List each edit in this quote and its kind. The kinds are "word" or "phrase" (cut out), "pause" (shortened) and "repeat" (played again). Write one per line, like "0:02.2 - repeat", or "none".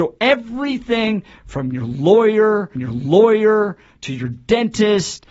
0:02.8 - repeat